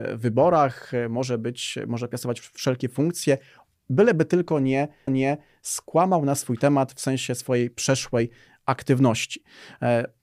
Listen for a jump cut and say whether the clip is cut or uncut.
cut